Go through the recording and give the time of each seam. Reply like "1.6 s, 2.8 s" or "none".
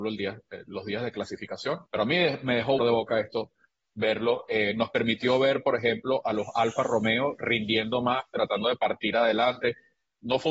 1.9 s, 2.8 s